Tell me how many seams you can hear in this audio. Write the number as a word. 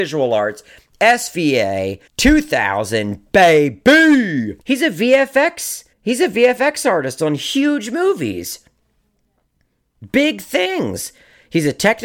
three